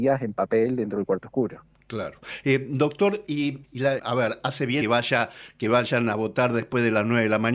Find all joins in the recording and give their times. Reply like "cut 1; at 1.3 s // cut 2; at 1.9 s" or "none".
cut 1; at 3.6 s // cut 2; at 4.0 s // cut 3; at 4.8 s